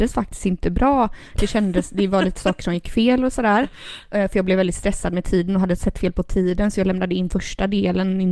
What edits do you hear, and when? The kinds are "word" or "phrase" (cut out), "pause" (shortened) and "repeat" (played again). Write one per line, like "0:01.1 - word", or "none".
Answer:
none